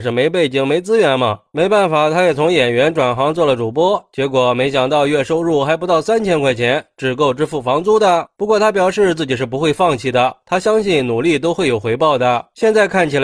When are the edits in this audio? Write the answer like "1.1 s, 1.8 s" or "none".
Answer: none